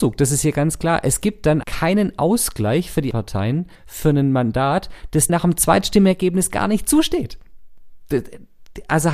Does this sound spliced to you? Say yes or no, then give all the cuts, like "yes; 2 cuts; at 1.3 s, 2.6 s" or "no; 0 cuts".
yes; 4 cuts; at 1.6 s, 3.1 s, 3.7 s, 5.3 s